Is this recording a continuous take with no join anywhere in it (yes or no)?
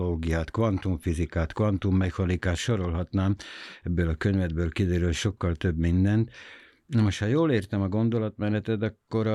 yes